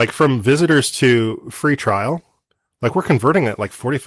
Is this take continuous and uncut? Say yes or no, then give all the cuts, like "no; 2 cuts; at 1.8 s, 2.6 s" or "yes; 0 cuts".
yes; 0 cuts